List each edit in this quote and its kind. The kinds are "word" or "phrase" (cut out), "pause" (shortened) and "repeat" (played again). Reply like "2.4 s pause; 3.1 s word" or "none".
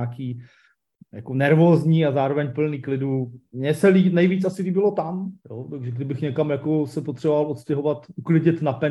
5.4 s pause